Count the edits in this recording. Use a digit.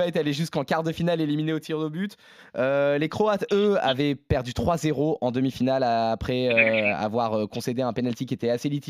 0